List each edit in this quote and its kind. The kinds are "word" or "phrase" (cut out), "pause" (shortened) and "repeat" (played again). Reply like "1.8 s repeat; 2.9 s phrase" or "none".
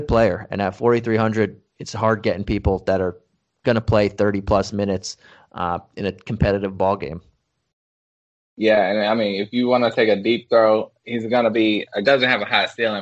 11.0 s pause; 12.0 s phrase